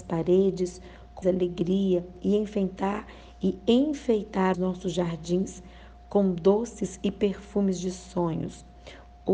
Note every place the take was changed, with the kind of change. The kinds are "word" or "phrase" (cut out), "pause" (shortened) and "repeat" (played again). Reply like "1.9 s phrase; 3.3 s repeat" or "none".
1.2 s word; 4.5 s word